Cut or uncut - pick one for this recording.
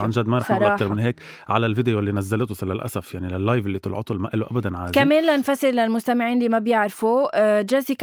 uncut